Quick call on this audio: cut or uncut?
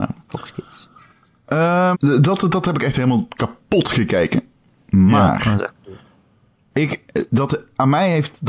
cut